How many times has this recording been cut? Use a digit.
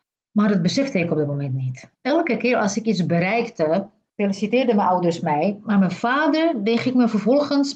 1